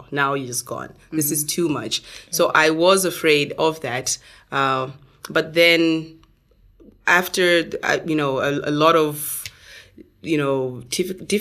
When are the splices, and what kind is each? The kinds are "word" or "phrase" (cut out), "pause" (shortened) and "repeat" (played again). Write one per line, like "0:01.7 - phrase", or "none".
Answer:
none